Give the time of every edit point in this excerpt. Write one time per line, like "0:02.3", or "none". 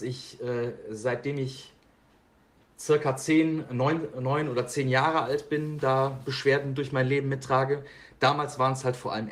none